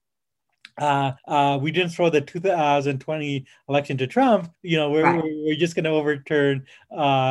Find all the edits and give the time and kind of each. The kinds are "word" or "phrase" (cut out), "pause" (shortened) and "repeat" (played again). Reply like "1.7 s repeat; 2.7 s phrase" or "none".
1.2 s pause; 4.5 s pause